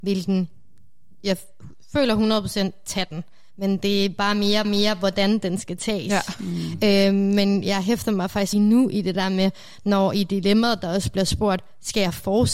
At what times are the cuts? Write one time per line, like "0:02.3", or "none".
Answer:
0:04.6
0:08.5